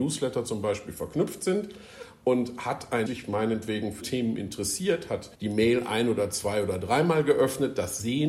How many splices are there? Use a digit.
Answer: 3